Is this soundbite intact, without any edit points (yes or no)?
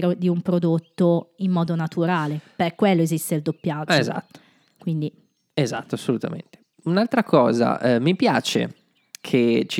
yes